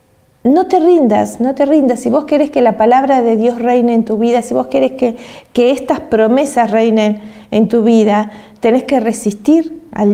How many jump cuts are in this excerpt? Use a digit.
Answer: 0